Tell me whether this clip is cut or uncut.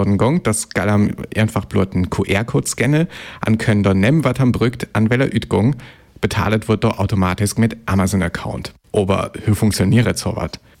uncut